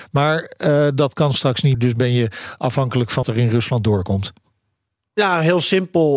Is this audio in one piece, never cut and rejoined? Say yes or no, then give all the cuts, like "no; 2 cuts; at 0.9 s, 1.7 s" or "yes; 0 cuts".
no; 2 cuts; at 1.7 s, 3.2 s